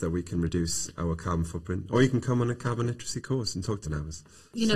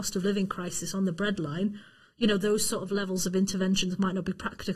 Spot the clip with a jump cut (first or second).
first